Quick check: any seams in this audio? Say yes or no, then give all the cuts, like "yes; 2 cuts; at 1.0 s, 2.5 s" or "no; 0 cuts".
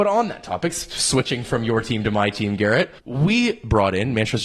yes; 1 cut; at 3.0 s